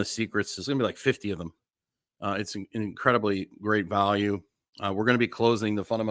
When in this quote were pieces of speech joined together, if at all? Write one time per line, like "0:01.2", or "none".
none